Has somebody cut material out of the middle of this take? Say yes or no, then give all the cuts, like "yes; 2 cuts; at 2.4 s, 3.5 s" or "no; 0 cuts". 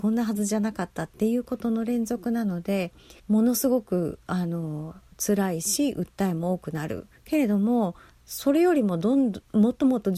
yes; 3 cuts; at 3.2 s, 7.2 s, 8.1 s